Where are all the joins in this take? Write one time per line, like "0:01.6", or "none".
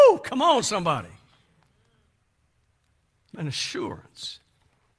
0:03.3